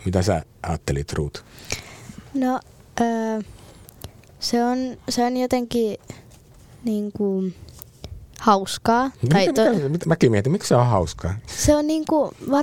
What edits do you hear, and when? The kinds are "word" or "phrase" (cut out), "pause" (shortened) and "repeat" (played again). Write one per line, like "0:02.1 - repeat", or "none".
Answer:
none